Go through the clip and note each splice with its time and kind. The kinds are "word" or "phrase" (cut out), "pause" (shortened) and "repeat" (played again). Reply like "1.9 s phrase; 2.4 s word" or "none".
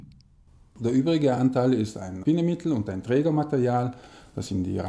none